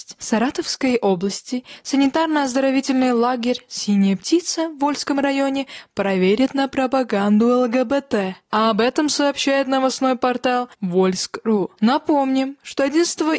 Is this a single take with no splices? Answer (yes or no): no